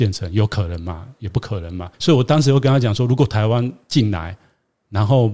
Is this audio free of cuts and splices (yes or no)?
no